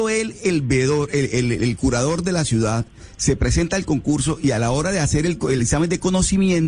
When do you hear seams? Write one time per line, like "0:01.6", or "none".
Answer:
none